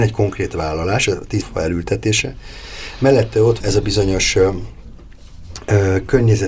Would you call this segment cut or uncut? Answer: cut